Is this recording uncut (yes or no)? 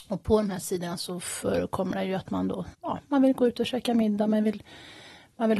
no